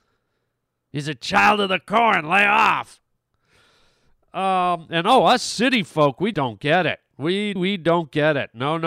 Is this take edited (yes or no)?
yes